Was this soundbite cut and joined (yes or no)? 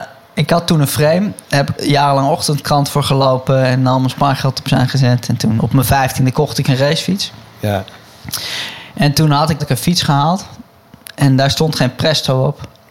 yes